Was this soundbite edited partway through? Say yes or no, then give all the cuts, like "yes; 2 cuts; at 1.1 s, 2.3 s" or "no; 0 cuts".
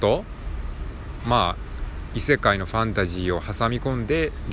yes; 1 cut; at 1.2 s